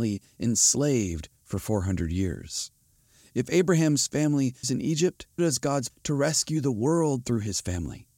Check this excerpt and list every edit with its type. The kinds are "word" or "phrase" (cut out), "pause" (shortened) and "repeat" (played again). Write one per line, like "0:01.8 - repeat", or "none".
0:04.6 - word
0:05.4 - word
0:05.9 - word

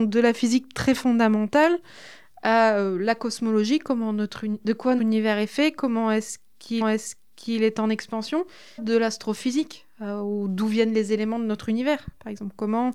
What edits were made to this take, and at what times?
0:05.0 - word
0:06.8 - repeat
0:08.8 - word

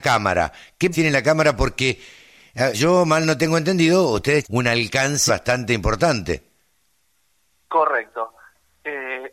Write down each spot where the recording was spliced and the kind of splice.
0:00.9 - word
0:02.7 - word
0:04.4 - word
0:05.3 - word

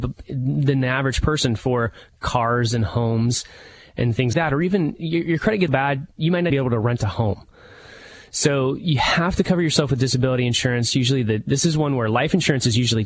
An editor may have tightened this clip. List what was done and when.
0:04.3 - word
0:05.7 - word
0:06.5 - word

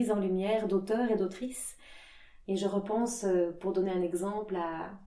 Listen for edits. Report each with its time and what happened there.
none

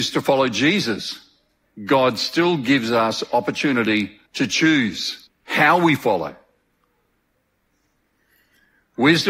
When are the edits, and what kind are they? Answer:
0:04.3 - pause
0:05.3 - pause

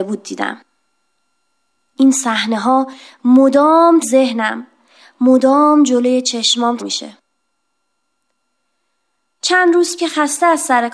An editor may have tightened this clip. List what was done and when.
0:04.0 - word
0:06.8 - word
0:10.0 - word

